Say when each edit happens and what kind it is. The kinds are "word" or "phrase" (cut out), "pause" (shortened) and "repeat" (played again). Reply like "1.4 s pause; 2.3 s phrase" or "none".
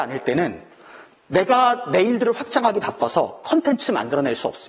none